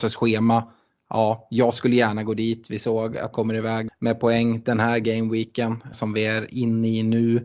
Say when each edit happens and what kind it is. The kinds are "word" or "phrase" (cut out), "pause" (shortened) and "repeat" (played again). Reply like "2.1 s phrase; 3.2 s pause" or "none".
3.3 s word; 3.9 s word; 5.9 s word

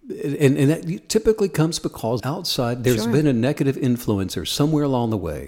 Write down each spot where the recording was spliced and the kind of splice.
2.2 s phrase

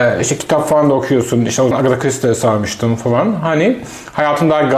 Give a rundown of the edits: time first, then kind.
1.7 s word

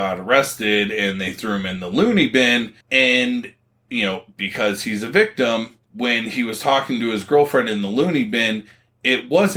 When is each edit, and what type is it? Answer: 2.8 s pause; 5.8 s pause

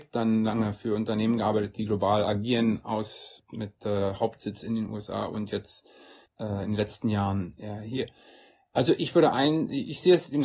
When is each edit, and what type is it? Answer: none

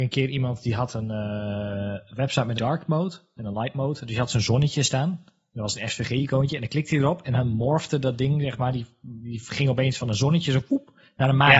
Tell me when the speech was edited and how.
2.6 s word

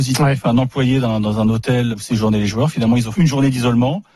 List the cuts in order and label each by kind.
1.9 s word; 3.1 s word

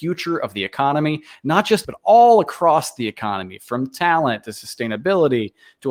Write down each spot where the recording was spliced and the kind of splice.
1.8 s phrase

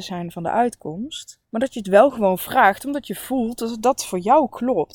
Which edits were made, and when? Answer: 1.4 s pause

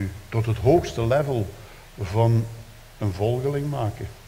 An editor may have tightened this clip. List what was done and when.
none

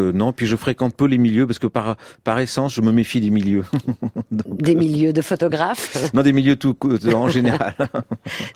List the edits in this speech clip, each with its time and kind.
none

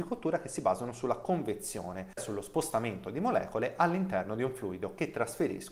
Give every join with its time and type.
2.2 s word

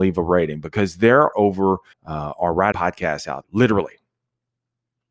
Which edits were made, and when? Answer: 1.3 s word; 1.9 s pause; 2.7 s phrase; 3.4 s word

